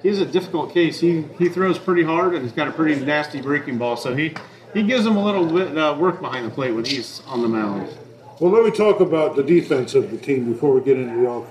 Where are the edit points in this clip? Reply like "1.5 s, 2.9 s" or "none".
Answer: none